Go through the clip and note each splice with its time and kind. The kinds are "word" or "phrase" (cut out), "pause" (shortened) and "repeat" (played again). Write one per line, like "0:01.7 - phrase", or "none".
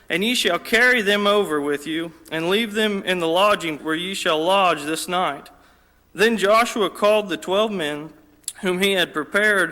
0:03.8 - word